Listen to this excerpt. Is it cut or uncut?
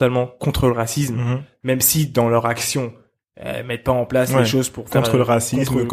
uncut